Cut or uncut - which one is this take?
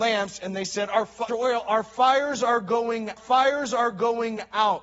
cut